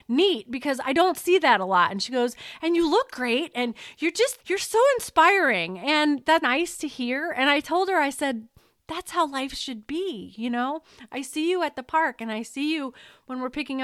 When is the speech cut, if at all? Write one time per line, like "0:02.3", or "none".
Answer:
0:04.4
0:06.4